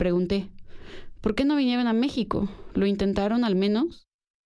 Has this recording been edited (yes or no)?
no